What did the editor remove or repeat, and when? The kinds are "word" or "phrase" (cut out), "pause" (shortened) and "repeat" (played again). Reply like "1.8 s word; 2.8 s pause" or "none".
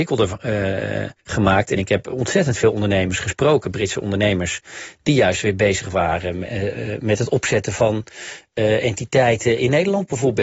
1.2 s pause